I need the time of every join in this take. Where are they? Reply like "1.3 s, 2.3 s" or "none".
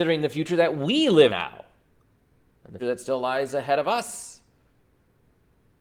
1.3 s, 2.8 s